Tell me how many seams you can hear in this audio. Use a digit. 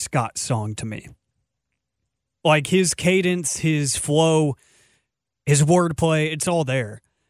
0